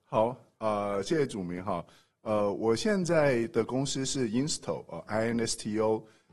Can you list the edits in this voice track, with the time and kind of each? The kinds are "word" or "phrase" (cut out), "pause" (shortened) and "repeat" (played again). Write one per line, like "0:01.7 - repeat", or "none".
none